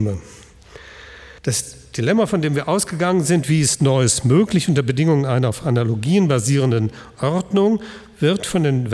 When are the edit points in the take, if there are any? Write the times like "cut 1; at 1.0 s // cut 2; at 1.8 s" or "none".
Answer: cut 1; at 1.4 s